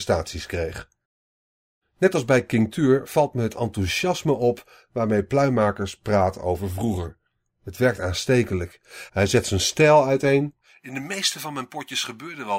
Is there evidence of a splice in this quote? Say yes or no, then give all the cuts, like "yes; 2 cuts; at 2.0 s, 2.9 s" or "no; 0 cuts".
no; 0 cuts